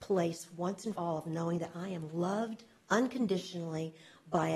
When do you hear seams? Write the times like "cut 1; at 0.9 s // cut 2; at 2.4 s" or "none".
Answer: cut 1; at 1.0 s